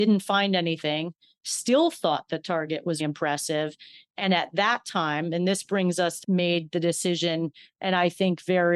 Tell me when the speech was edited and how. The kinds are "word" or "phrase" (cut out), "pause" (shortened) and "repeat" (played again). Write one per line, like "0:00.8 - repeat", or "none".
0:03.0 - word
0:06.2 - phrase